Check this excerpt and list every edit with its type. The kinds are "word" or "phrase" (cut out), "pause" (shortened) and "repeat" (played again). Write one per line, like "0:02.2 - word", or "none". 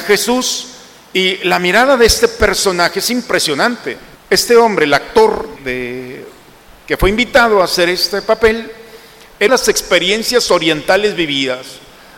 0:04.1 - pause
0:05.6 - word
0:09.5 - phrase